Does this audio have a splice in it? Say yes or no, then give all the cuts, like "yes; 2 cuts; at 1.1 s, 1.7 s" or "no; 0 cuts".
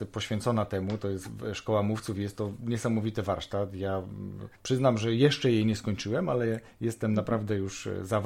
yes; 1 cut; at 4.5 s